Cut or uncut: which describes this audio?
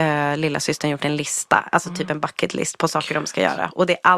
uncut